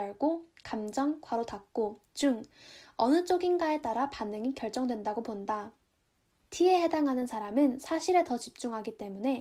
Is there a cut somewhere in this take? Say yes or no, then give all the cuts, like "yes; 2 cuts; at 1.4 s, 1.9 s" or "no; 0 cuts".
no; 0 cuts